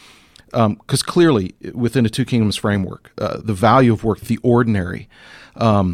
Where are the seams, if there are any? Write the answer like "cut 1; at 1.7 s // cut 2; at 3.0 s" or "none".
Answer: cut 1; at 3.4 s // cut 2; at 4.2 s

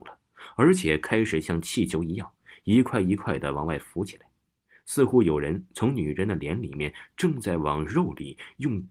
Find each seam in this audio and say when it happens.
none

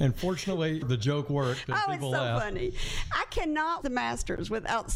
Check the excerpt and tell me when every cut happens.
cut 1; at 3.8 s

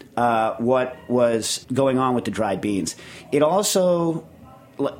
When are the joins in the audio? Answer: cut 1; at 1.6 s

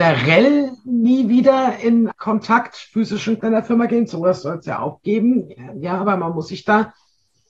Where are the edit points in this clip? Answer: cut 1; at 2.1 s // cut 2; at 3.4 s

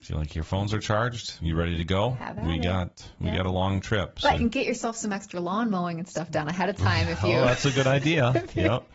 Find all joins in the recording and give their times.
cut 1; at 4.4 s

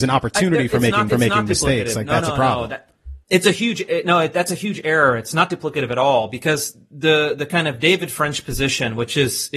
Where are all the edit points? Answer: cut 1; at 1.1 s // cut 2; at 3.2 s

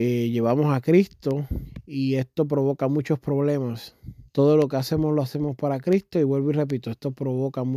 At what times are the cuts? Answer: cut 1; at 4.3 s

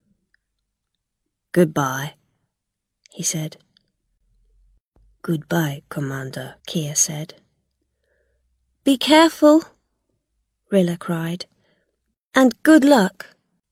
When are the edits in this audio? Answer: cut 1; at 6.6 s

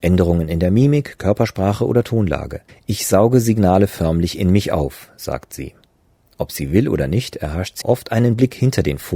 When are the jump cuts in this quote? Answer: cut 1; at 2.7 s // cut 2; at 7.8 s

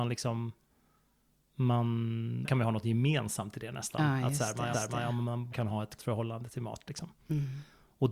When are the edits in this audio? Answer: cut 1; at 2.4 s // cut 2; at 4.7 s // cut 3; at 5.5 s // cut 4; at 6.0 s

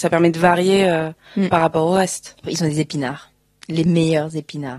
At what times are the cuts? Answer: cut 1; at 2.4 s

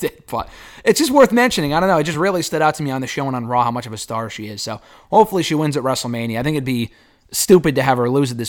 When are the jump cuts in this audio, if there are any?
none

